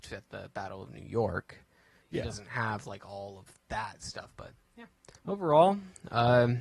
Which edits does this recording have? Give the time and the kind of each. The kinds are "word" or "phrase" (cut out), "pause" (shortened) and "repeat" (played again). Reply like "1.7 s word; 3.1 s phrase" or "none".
2.0 s word; 5.2 s pause